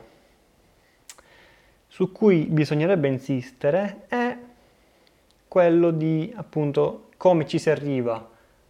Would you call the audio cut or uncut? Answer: uncut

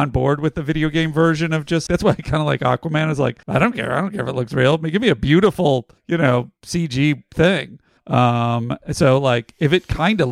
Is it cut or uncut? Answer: cut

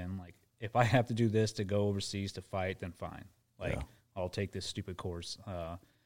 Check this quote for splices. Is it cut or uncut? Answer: uncut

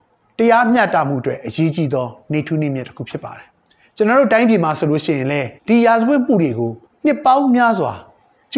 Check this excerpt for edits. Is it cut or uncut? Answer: cut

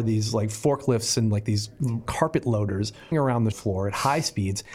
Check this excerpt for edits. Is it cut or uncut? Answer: cut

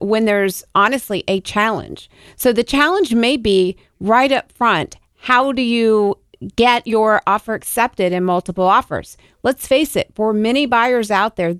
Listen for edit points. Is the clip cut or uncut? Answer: uncut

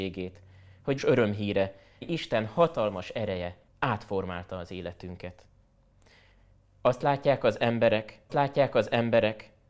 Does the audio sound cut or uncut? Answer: cut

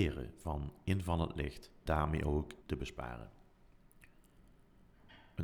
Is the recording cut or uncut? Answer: cut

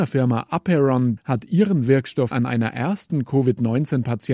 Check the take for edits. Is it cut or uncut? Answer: cut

